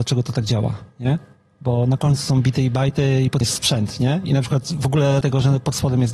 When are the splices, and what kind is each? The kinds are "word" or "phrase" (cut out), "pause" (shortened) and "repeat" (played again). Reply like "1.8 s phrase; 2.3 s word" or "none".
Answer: 3.4 s word; 5.2 s word